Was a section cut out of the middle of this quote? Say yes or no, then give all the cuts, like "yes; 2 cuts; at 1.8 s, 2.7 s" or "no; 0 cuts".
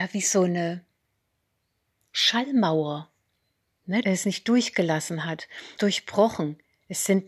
yes; 2 cuts; at 4.0 s, 5.8 s